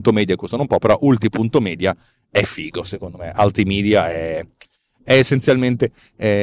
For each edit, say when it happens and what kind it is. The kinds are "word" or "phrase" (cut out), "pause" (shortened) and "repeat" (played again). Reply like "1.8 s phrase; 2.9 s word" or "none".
none